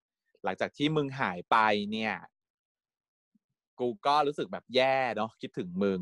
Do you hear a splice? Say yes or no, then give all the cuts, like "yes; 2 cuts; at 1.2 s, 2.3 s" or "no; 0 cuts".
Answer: no; 0 cuts